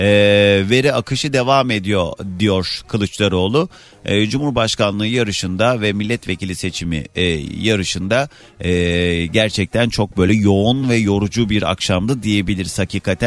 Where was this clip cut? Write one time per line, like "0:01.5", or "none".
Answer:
none